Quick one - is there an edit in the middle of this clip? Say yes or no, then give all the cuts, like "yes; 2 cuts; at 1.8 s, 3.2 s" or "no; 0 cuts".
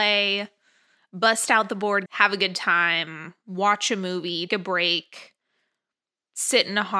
yes; 2 cuts; at 2.1 s, 4.5 s